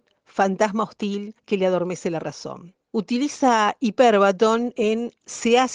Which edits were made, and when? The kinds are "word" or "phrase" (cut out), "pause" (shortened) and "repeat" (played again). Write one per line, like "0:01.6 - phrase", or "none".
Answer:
0:01.4 - pause
0:02.8 - pause

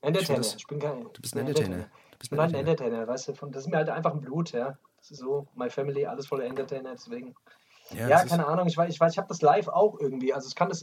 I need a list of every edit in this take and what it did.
0:05.2 - word

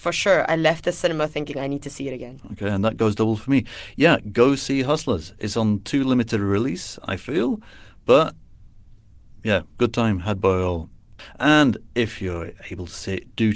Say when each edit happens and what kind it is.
none

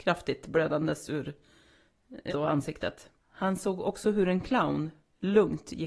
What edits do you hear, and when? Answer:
0:02.3 - word
0:03.2 - pause

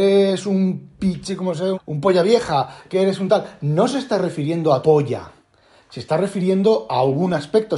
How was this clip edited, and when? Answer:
0:01.7 - word
0:04.8 - word

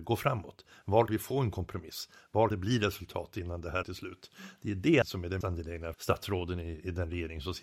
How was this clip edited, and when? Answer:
0:01.1 - word
0:02.5 - word
0:03.8 - word
0:05.0 - word
0:05.4 - word
0:05.9 - word

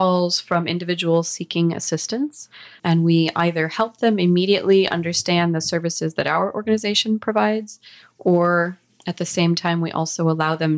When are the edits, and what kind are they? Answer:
0:02.8 - word

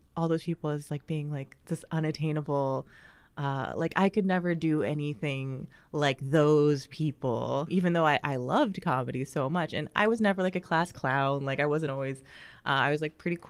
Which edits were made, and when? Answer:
none

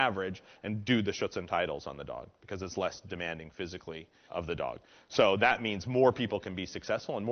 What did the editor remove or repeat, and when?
0:04.3 - word

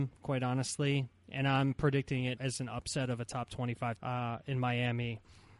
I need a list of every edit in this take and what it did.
0:02.4 - word
0:04.0 - word

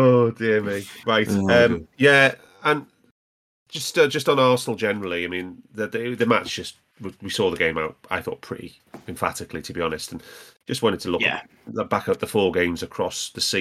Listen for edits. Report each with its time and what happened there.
none

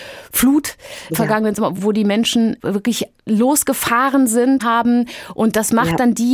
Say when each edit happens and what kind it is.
0:01.1 - word
0:01.8 - word
0:04.6 - phrase

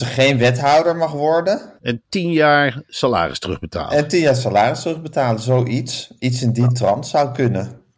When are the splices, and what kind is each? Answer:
0:01.8 - pause

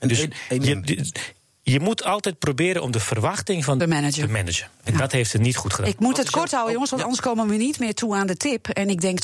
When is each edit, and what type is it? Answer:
0:03.8 - phrase

